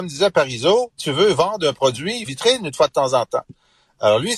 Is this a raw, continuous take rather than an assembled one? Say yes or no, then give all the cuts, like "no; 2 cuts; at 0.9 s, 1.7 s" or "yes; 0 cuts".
no; 2 cuts; at 1.0 s, 2.3 s